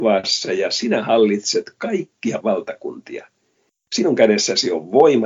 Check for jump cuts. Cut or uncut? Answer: cut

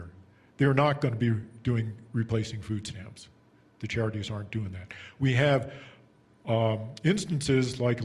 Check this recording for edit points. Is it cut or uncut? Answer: uncut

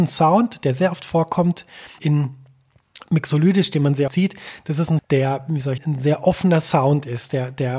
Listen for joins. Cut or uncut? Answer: cut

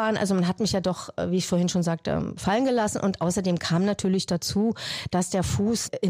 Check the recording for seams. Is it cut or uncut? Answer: uncut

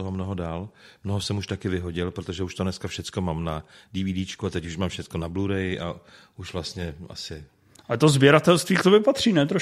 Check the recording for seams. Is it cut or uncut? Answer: uncut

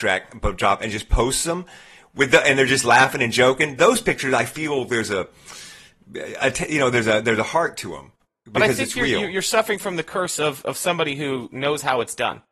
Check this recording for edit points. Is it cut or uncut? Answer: uncut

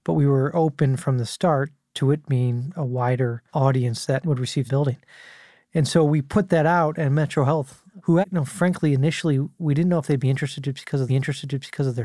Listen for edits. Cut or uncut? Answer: cut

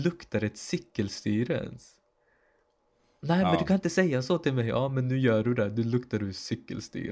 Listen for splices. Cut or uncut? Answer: uncut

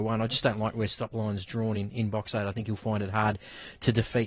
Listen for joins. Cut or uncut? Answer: uncut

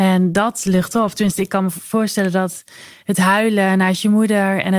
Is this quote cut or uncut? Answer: uncut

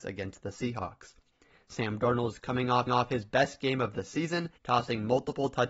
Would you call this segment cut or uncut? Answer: cut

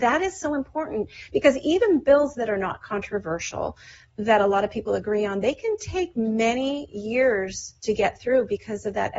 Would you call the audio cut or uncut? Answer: uncut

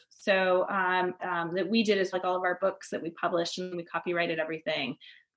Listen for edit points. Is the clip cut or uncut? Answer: cut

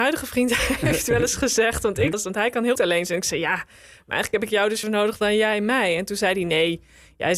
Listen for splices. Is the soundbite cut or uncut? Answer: cut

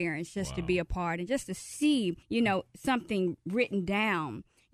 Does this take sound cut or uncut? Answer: cut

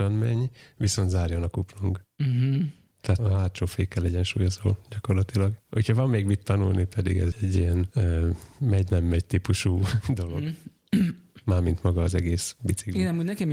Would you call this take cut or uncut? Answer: cut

